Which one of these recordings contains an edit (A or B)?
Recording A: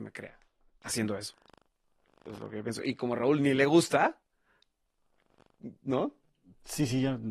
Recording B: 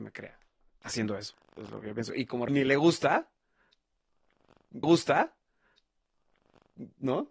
B